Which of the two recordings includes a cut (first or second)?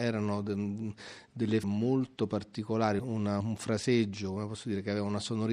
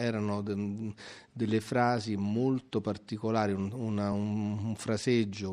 first